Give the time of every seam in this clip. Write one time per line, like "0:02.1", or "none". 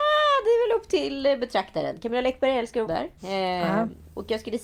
0:02.9
0:03.2